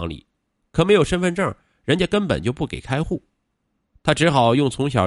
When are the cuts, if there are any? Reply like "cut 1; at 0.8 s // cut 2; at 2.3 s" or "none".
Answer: none